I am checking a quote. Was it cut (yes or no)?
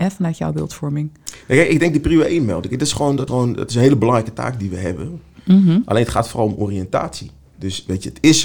yes